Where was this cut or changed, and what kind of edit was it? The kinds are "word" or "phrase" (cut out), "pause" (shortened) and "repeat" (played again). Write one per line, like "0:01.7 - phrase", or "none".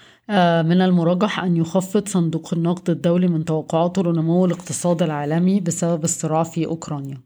none